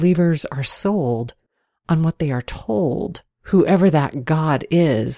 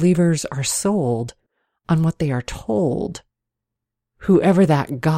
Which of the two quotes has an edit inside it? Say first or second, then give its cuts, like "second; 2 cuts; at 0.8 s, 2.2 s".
first; 1 cut; at 3.3 s